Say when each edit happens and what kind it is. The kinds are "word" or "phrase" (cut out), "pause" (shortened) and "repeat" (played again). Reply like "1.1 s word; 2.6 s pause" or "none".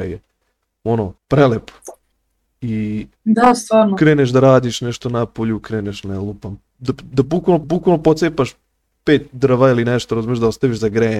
1.2 s pause; 3.2 s pause; 7.6 s repeat